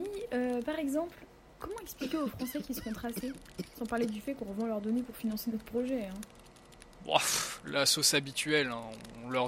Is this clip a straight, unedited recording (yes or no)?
yes